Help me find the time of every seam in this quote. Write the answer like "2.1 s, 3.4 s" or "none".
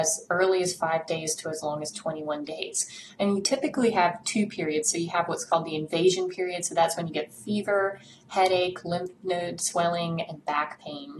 none